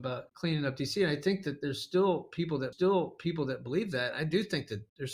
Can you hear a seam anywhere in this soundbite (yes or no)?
yes